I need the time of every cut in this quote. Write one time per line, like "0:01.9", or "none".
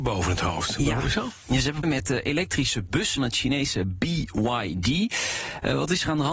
0:01.8
0:03.2

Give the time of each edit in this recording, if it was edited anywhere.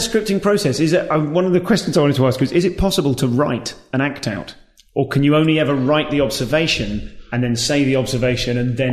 none

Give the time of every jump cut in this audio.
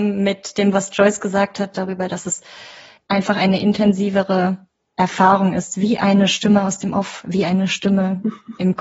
none

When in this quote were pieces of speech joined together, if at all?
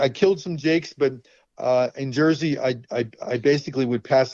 none

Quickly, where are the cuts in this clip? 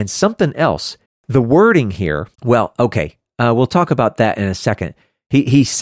0:01.1
0:02.3

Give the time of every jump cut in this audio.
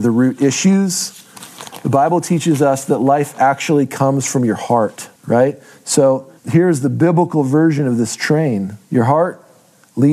0:05.2
0:06.4
0:08.8

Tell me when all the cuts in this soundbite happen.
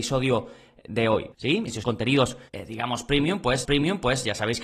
0:01.8
0:02.5
0:03.6

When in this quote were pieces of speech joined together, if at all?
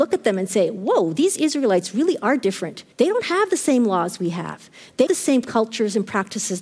0:02.9
0:05.1

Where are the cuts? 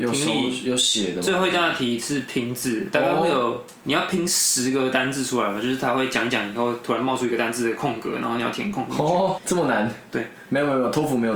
0:09.4

